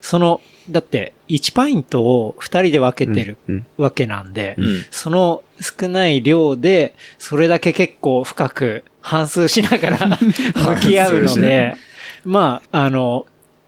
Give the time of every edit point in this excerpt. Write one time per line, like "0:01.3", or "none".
0:01.2
0:12.7